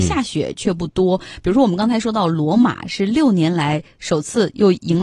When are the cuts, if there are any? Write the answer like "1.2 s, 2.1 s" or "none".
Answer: none